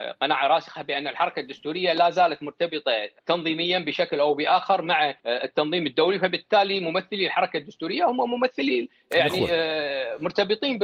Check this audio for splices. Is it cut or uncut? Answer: cut